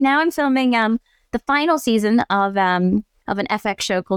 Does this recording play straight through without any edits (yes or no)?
yes